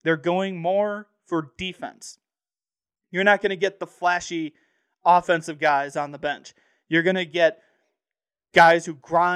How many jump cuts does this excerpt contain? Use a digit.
0